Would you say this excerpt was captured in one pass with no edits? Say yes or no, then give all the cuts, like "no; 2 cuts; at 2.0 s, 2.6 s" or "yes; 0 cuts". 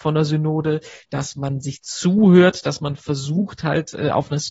yes; 0 cuts